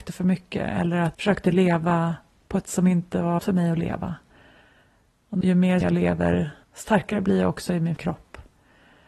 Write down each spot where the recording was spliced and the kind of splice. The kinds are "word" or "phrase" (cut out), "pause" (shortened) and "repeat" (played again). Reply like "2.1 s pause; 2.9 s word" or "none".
1.1 s word; 2.6 s word; 3.4 s word; 5.4 s word; 5.8 s word; 6.6 s word; 8.0 s word